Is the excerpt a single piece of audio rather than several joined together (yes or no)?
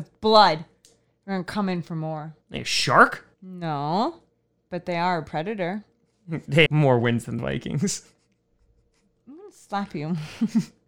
no